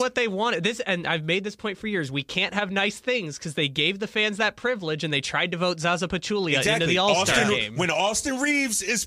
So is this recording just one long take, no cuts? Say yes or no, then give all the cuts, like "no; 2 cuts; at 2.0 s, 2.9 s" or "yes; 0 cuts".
yes; 0 cuts